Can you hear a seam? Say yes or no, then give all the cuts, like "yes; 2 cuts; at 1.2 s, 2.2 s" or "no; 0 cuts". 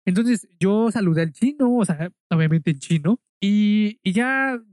yes; 1 cut; at 3.3 s